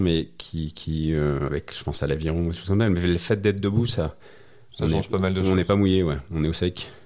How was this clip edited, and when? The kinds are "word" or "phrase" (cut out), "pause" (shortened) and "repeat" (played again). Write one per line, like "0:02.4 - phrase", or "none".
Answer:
none